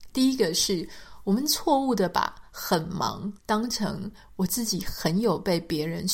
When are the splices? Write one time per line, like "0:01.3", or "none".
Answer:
0:03.4